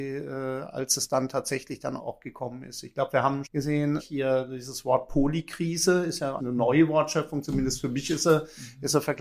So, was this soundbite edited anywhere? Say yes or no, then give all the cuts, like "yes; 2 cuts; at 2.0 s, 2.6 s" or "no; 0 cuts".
yes; 4 cuts; at 2.0 s, 3.4 s, 4.0 s, 6.4 s